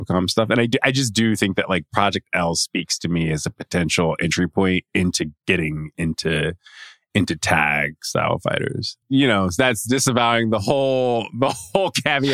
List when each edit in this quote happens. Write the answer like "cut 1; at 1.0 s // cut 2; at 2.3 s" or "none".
cut 1; at 9.0 s